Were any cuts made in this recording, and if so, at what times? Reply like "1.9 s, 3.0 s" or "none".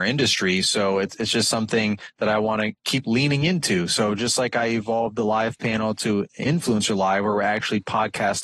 none